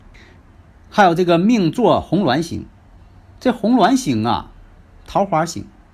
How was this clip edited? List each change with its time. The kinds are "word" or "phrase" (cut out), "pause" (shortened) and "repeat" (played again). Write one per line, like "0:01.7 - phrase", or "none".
none